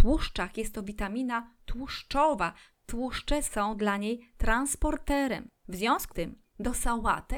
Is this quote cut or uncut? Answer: cut